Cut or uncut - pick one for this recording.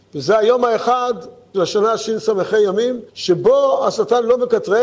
cut